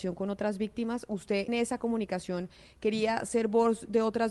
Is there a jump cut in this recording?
yes; 1 cut; at 1.5 s

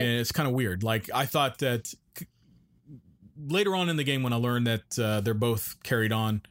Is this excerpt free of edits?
yes; 0 cuts

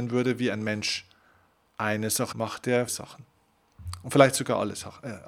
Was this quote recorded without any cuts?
no; 2 cuts; at 2.3 s, 2.9 s

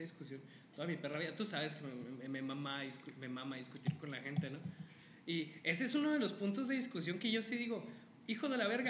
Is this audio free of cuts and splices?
yes; 0 cuts

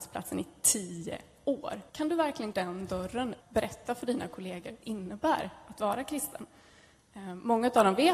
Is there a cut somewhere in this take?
yes; 4 cuts; at 1.9 s, 2.5 s, 3.4 s, 4.8 s

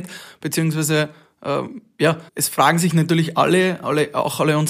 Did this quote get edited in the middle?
yes; 1 cut; at 2.3 s

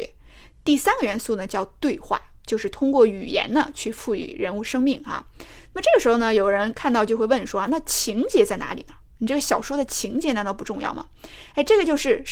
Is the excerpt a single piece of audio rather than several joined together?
yes; 0 cuts

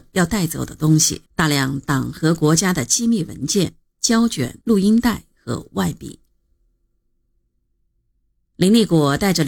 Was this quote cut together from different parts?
yes; 2 cuts; at 1.3 s, 4.6 s

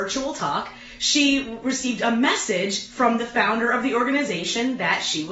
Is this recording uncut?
yes; 0 cuts

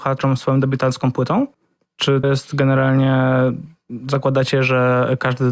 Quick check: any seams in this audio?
yes; 1 cut; at 2.2 s

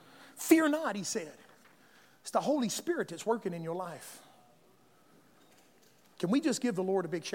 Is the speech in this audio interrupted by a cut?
no; 0 cuts

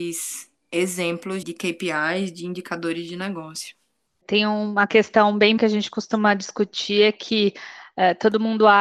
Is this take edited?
yes; 2 cuts; at 1.4 s, 5.6 s

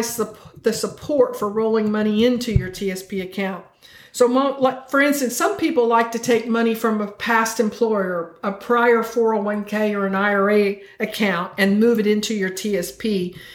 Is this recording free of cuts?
yes; 0 cuts

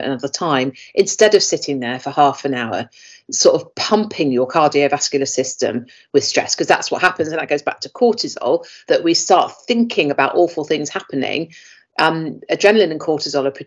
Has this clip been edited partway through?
no; 0 cuts

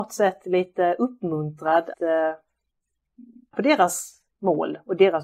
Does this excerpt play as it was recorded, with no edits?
no; 2 cuts; at 1.9 s, 3.5 s

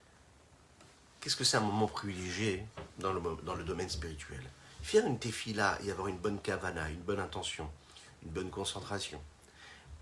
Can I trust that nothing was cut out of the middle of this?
yes; 0 cuts

